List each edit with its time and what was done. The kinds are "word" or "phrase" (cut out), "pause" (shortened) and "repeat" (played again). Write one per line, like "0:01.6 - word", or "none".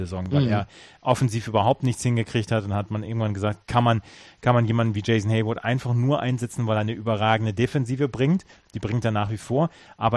0:03.6 - pause